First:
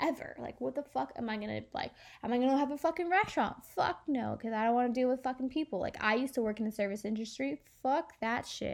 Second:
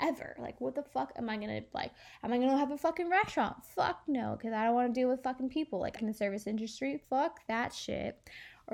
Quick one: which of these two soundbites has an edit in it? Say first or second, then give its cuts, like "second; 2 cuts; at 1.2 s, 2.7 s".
second; 2 cuts; at 6.0 s, 7.0 s